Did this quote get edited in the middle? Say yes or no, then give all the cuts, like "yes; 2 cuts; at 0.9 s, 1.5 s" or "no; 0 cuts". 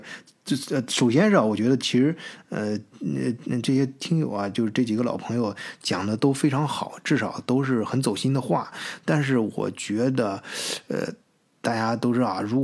no; 0 cuts